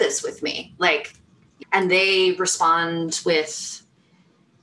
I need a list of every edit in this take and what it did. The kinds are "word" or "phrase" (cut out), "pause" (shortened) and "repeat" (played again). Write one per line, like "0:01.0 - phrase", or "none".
0:01.6 - word